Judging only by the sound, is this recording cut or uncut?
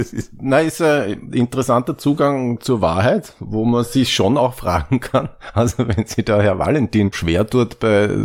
cut